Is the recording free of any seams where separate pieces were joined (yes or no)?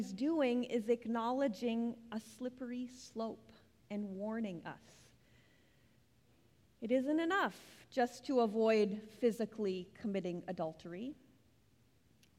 yes